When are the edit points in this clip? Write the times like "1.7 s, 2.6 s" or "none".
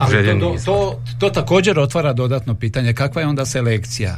none